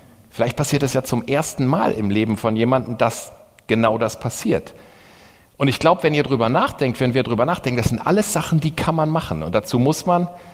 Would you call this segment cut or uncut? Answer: uncut